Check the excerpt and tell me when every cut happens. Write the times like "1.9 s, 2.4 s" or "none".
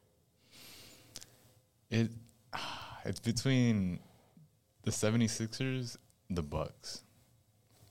6.1 s